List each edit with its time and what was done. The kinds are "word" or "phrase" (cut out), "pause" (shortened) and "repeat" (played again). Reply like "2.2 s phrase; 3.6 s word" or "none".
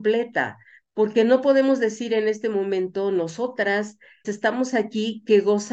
4.2 s word